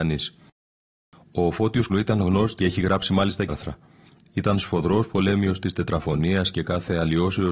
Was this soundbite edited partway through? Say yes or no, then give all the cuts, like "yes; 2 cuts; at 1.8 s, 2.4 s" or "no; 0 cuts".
yes; 3 cuts; at 1.9 s, 2.6 s, 3.5 s